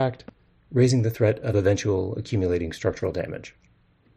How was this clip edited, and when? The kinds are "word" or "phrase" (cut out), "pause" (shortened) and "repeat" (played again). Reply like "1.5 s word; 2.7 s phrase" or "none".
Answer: none